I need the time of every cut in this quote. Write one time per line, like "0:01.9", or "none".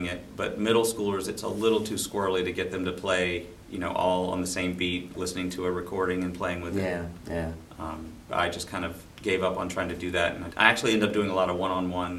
0:05.1
0:08.3
0:10.5